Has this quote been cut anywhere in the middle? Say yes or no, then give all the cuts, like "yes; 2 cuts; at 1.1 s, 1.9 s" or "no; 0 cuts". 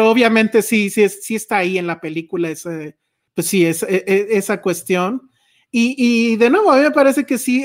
no; 0 cuts